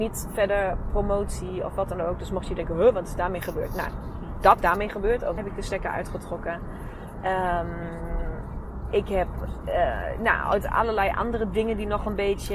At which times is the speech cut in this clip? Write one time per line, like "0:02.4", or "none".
0:04.6
0:05.4